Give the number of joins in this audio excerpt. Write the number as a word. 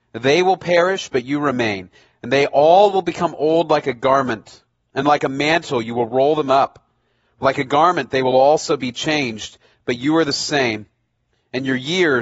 zero